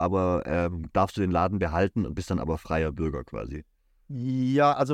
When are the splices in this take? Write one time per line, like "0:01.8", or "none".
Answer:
none